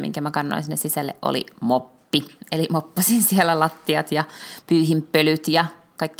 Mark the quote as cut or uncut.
uncut